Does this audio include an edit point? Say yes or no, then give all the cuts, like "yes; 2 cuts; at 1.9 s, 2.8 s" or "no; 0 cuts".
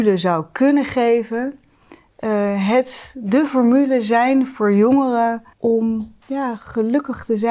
yes; 1 cut; at 5.5 s